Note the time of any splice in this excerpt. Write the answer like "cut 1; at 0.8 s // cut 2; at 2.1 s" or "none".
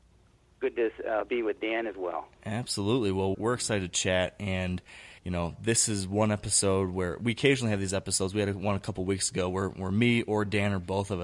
cut 1; at 2.4 s // cut 2; at 3.3 s // cut 3; at 5.2 s